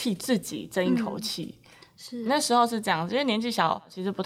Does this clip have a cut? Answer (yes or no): yes